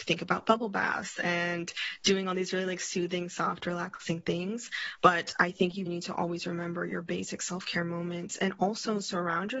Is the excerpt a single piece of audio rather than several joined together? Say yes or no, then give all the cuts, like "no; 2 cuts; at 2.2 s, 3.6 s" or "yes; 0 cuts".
no; 1 cut; at 5.9 s